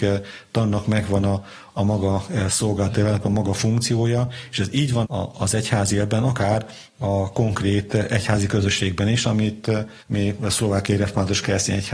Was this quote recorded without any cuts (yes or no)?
no